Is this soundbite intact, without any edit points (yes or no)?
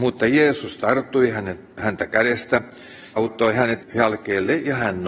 no